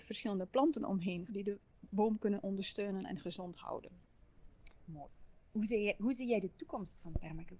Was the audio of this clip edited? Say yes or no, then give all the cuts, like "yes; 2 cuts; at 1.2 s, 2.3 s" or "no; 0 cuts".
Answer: yes; 1 cut; at 1.3 s